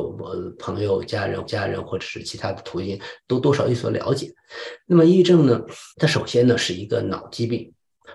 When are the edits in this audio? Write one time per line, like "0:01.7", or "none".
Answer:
0:01.4
0:05.9